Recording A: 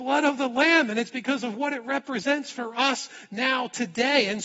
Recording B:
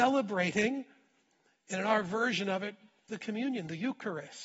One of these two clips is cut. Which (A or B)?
B